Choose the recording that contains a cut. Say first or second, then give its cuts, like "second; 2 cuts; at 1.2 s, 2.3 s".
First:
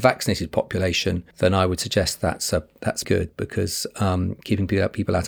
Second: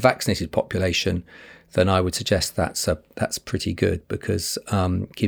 first; 2 cuts; at 1.3 s, 3.0 s